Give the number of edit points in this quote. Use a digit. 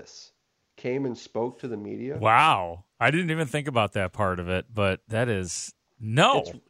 0